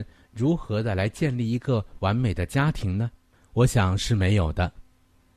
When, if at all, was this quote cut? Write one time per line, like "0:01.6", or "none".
0:03.3